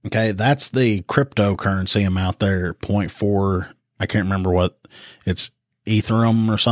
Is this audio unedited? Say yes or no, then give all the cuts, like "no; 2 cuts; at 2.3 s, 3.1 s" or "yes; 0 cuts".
yes; 0 cuts